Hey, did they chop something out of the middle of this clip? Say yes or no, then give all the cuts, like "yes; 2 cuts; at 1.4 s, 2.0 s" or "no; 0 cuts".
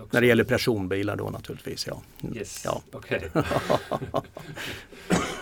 no; 0 cuts